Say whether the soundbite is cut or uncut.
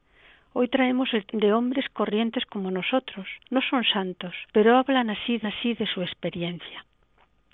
cut